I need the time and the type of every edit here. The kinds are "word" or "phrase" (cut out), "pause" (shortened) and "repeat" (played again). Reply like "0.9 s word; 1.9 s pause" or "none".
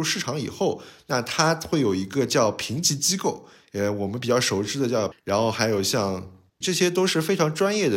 5.1 s word; 6.6 s word